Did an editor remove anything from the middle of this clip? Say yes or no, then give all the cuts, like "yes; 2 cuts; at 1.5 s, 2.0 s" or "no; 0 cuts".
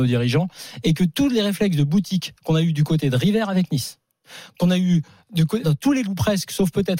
yes; 2 cuts; at 5.6 s, 6.0 s